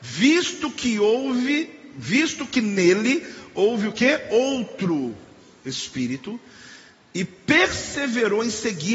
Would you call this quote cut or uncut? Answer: uncut